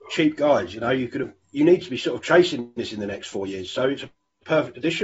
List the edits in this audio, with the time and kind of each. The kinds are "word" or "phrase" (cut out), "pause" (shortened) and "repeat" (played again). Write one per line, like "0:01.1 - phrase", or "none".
0:01.4 - pause